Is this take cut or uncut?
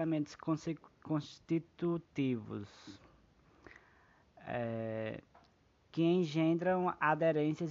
uncut